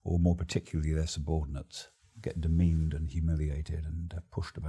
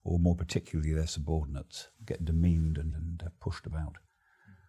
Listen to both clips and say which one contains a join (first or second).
second